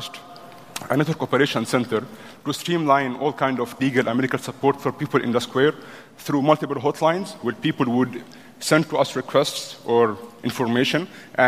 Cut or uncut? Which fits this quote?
cut